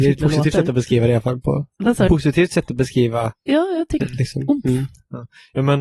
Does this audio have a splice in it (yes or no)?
yes